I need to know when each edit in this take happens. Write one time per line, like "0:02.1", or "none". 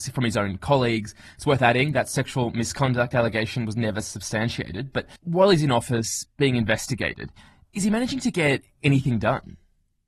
0:05.2